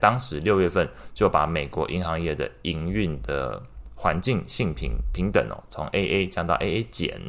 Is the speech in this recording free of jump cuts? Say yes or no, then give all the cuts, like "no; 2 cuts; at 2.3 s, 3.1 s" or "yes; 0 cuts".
yes; 0 cuts